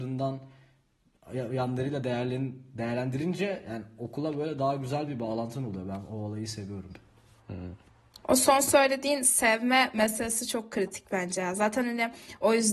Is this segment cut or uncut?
uncut